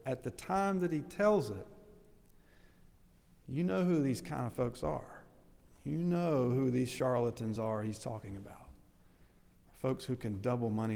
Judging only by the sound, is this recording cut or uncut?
uncut